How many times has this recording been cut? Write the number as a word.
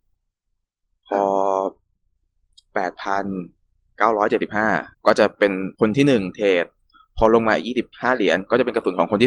three